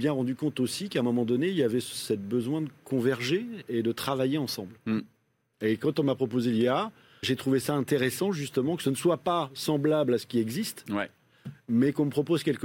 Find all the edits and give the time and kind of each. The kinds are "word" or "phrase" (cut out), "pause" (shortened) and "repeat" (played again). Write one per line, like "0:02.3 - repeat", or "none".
0:04.8 - pause
0:07.2 - word